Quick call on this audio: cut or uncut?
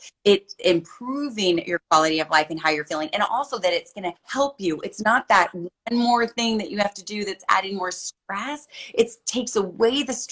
cut